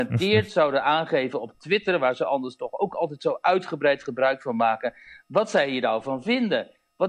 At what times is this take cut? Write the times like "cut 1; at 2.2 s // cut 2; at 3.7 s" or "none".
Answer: none